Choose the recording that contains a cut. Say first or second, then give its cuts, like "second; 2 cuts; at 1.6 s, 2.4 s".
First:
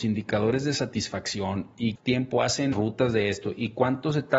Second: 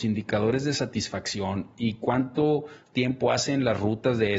first; 2 cuts; at 2.0 s, 2.7 s